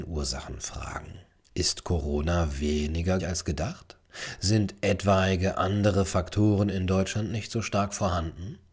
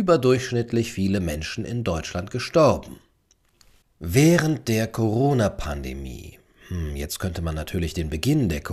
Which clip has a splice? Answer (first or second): first